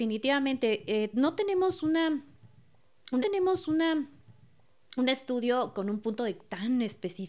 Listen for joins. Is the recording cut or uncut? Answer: cut